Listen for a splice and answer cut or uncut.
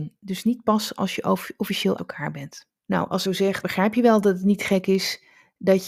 cut